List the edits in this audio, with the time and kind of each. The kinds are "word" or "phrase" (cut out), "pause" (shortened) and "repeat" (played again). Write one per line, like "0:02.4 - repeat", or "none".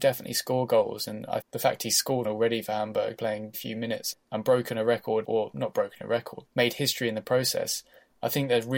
0:01.4 - word
0:02.2 - word
0:03.2 - word
0:03.5 - word
0:04.1 - word
0:05.2 - word
0:06.5 - word